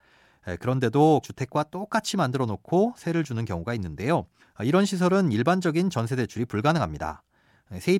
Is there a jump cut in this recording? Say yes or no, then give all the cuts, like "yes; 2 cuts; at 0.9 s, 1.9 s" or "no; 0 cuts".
yes; 2 cuts; at 1.2 s, 4.4 s